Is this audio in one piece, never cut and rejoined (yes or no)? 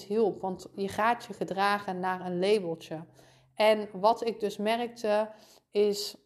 yes